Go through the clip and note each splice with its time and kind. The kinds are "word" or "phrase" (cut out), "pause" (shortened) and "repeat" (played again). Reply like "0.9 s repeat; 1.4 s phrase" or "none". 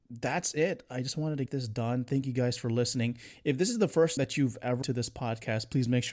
1.5 s word; 4.2 s word; 4.8 s word